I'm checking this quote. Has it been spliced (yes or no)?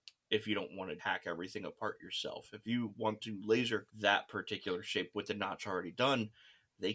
yes